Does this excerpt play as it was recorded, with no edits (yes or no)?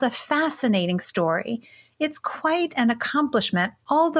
yes